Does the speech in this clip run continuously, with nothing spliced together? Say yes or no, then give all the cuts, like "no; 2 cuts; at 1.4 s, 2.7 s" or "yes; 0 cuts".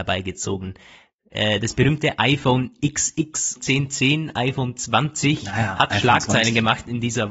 no; 1 cut; at 3.6 s